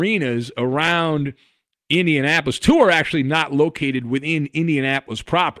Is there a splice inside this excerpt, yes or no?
no